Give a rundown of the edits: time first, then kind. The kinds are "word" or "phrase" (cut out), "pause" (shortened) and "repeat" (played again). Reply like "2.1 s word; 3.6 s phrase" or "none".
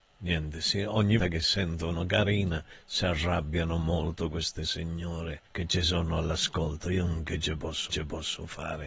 1.2 s word; 5.5 s pause; 7.9 s repeat